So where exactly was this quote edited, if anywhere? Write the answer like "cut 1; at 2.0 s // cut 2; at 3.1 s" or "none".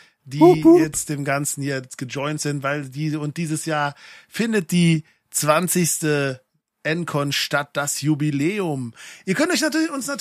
none